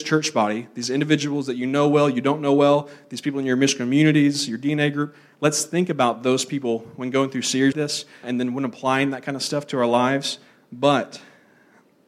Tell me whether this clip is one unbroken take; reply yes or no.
no